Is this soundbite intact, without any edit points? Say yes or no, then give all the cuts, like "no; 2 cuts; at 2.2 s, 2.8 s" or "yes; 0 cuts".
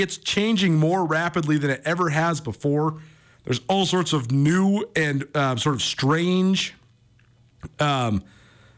yes; 0 cuts